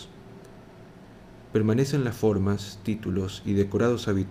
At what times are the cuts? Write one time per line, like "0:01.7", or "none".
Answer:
none